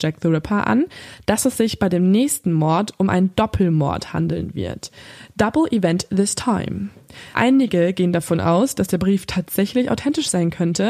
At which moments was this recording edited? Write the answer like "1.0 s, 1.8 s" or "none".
7.3 s